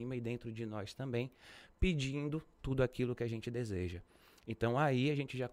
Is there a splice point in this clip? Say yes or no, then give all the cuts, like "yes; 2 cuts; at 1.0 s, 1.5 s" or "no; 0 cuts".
no; 0 cuts